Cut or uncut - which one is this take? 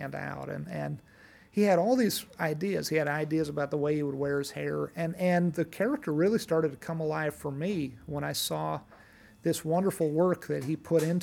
uncut